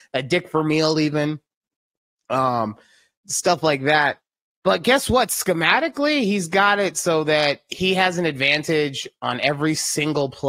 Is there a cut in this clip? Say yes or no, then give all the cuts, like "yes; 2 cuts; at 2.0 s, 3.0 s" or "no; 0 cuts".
no; 0 cuts